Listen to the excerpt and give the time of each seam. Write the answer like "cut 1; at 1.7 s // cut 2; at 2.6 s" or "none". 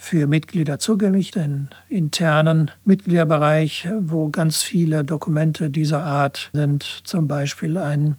cut 1; at 1.3 s // cut 2; at 2.8 s // cut 3; at 6.5 s

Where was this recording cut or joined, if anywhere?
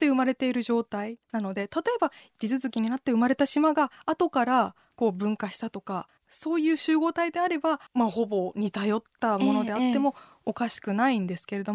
cut 1; at 1.2 s // cut 2; at 6.2 s // cut 3; at 7.9 s

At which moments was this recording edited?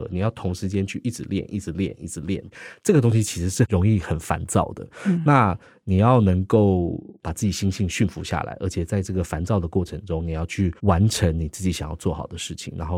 cut 1; at 10.8 s

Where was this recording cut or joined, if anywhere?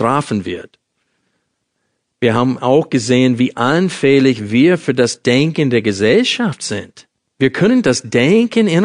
cut 1; at 7.3 s

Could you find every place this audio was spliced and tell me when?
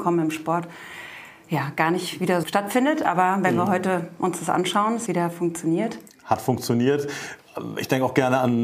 cut 1; at 2.4 s // cut 2; at 5.1 s

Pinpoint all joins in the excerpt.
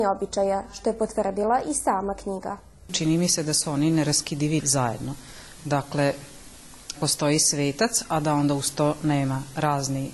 cut 1; at 4.6 s // cut 2; at 7.0 s

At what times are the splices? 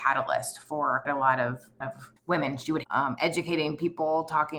cut 1; at 1.0 s // cut 2; at 1.8 s // cut 3; at 2.2 s // cut 4; at 2.8 s

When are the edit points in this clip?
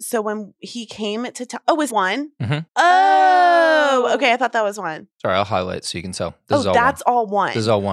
cut 1; at 1.9 s // cut 2; at 2.7 s // cut 3; at 5.1 s

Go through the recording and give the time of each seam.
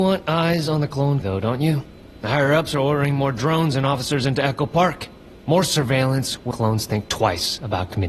cut 1; at 1.2 s // cut 2; at 6.5 s

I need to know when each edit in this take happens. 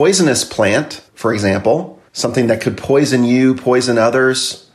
cut 1; at 1.1 s // cut 2; at 2.1 s

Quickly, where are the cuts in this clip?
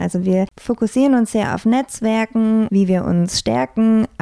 cut 1; at 2.7 s

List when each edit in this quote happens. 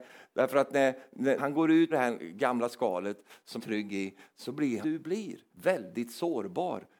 cut 1; at 1.4 s // cut 2; at 1.9 s // cut 3; at 3.6 s // cut 4; at 4.8 s // cut 5; at 5.5 s

